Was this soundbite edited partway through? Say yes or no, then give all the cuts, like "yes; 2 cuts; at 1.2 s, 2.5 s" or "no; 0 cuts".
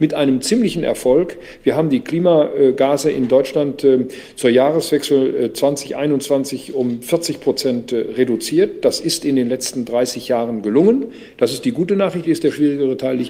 yes; 1 cut; at 12.2 s